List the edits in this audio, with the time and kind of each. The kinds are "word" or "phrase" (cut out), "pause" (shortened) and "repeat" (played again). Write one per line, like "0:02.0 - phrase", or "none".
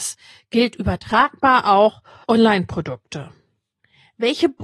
0:02.2 - word